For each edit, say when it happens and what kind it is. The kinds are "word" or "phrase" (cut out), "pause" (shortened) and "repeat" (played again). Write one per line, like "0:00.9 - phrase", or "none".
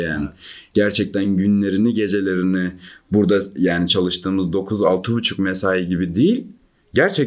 none